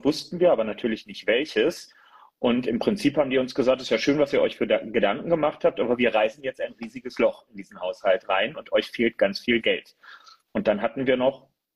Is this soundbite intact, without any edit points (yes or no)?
yes